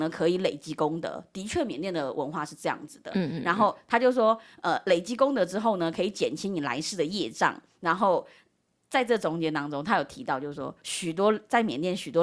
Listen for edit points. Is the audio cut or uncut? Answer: uncut